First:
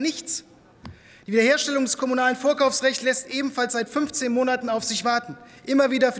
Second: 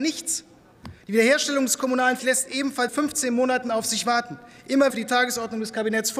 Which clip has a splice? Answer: second; 4 cuts; at 1.0 s, 2.2 s, 2.9 s, 4.9 s

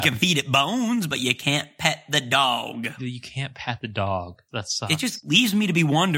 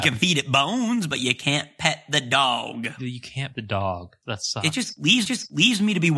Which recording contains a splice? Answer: second; 2 cuts; at 3.5 s, 5.2 s

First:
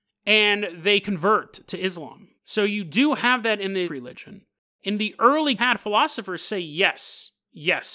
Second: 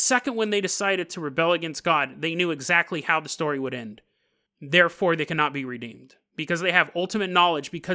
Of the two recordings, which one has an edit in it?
first; 3 cuts; at 2.4 s, 3.8 s, 5.6 s

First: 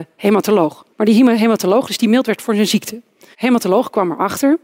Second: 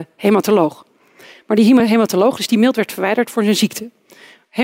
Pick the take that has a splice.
first; 3 cuts; at 0.9 s, 2.4 s, 3.3 s

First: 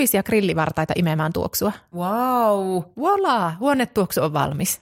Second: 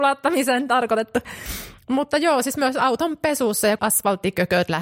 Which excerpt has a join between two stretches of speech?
second; 1 cut; at 3.8 s

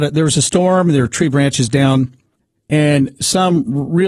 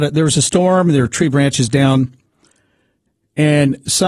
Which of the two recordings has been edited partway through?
first; 1 cut; at 2.4 s

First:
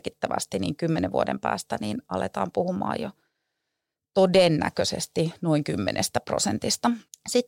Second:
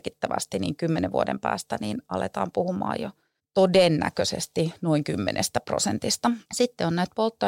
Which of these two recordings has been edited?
second; 2 cuts; at 3.4 s, 6.4 s

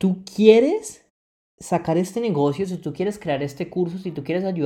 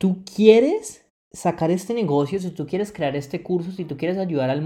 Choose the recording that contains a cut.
second; 1 cut; at 1.1 s

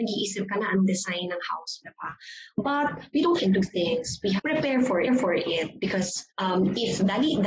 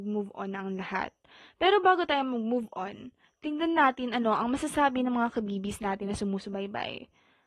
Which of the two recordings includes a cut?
first; 5 cuts; at 1.8 s, 3.4 s, 4.4 s, 5.1 s, 6.3 s

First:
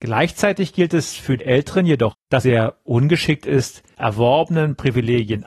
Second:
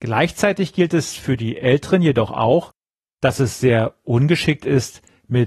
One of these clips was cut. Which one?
first; 4 cuts; at 1.4 s, 2.1 s, 2.4 s, 3.9 s

